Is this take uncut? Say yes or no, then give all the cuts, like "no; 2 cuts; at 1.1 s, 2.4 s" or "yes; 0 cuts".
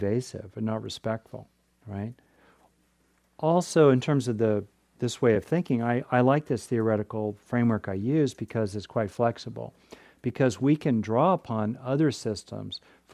yes; 0 cuts